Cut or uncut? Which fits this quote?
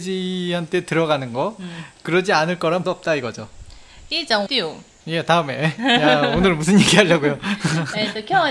cut